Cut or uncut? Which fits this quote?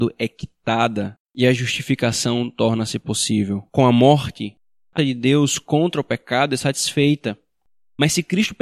cut